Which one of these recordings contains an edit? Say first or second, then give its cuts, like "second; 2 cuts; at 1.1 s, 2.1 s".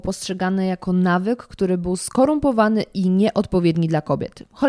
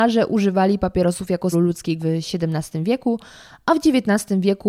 second; 2 cuts; at 1.5 s, 2.0 s